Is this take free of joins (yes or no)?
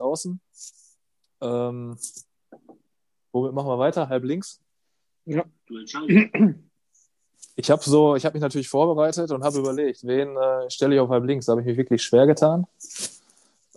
yes